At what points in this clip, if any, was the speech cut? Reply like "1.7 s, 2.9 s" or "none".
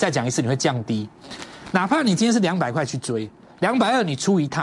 none